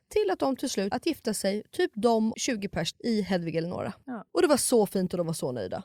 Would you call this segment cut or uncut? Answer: cut